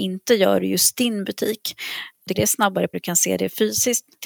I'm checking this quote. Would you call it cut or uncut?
cut